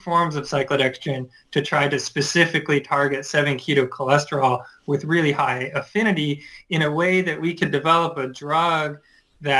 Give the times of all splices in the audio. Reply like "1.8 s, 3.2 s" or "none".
none